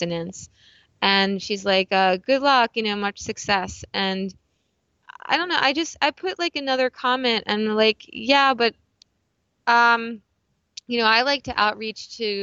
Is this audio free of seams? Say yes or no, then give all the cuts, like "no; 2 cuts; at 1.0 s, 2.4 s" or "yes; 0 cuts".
yes; 0 cuts